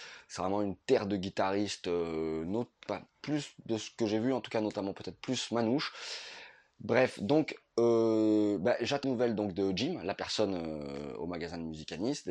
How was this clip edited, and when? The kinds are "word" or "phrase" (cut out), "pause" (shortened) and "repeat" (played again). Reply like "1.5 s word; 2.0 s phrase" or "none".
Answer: 9.0 s word